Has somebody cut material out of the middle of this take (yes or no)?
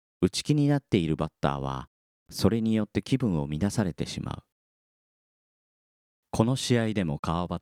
no